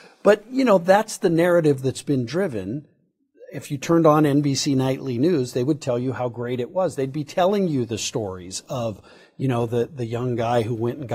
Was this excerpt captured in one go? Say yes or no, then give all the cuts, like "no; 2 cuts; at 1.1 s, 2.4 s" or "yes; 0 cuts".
yes; 0 cuts